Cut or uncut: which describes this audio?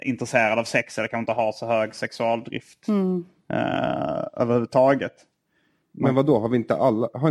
uncut